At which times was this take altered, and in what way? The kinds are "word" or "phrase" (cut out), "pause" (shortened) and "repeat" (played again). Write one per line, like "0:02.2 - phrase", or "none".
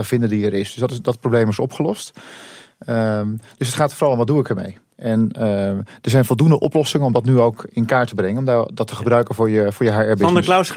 none